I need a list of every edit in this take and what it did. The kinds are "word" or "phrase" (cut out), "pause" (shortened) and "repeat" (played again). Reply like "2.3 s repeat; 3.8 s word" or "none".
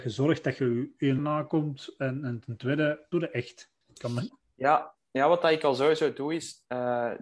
1.2 s phrase; 3.1 s phrase; 3.8 s pause